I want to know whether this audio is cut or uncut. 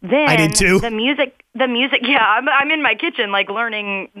uncut